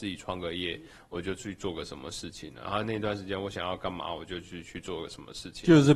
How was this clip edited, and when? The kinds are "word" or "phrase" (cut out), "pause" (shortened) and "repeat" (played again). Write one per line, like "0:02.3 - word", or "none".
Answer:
none